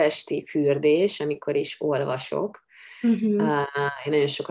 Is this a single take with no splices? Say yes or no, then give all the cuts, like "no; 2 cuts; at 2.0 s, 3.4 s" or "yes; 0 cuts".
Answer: yes; 0 cuts